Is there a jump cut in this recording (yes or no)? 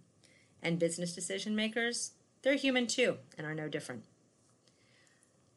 no